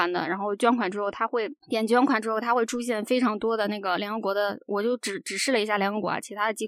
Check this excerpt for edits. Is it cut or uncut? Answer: cut